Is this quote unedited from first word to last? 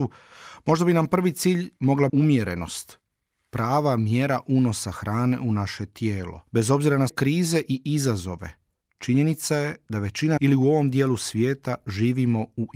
no; 4 cuts; at 2.1 s, 6.5 s, 7.1 s, 10.4 s

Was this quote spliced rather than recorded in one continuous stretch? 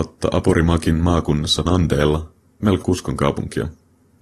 yes; 2 cuts; at 1.7 s, 2.8 s

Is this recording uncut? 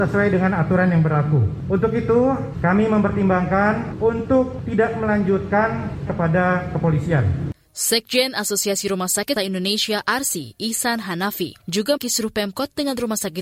no; 3 cuts; at 6.1 s, 9.4 s, 12.0 s

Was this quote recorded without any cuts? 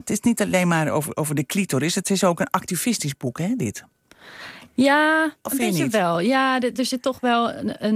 yes; 0 cuts

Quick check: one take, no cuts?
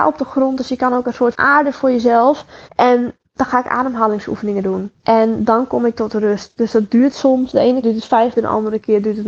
no; 5 cuts; at 1.3 s, 2.7 s, 5.0 s, 7.8 s, 8.4 s

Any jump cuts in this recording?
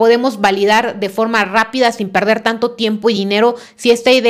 no; 0 cuts

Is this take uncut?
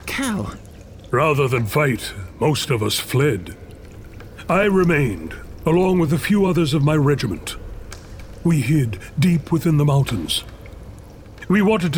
yes; 0 cuts

